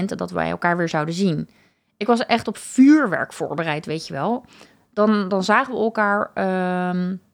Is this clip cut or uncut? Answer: uncut